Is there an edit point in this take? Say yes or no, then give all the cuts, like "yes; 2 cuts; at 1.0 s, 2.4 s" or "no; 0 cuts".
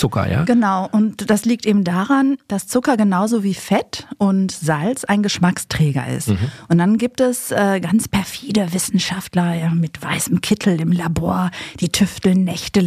no; 0 cuts